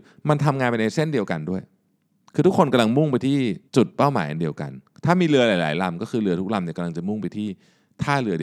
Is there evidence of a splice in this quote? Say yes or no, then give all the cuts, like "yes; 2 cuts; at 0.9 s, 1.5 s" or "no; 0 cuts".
yes; 1 cut; at 3.7 s